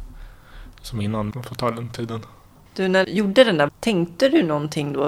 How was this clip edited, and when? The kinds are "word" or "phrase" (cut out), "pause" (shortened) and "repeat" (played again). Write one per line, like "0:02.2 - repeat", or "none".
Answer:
0:01.3 - word
0:03.0 - word
0:03.7 - word